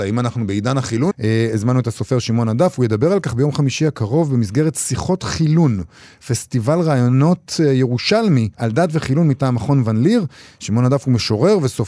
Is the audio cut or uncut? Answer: cut